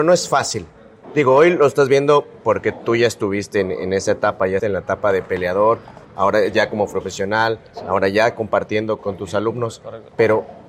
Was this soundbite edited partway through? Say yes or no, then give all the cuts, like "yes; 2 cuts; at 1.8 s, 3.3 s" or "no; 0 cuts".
yes; 3 cuts; at 4.6 s, 6.0 s, 9.0 s